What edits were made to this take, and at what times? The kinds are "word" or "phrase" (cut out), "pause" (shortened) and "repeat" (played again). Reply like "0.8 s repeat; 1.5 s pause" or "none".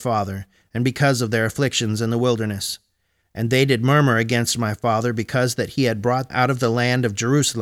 6.3 s word